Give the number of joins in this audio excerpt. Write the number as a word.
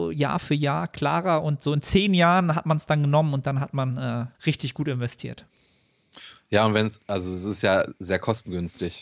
one